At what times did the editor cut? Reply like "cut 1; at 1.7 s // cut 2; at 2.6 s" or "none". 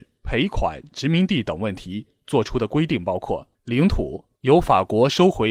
cut 1; at 3.5 s // cut 2; at 4.3 s